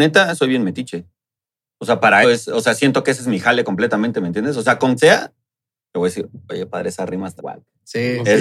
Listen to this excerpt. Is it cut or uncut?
cut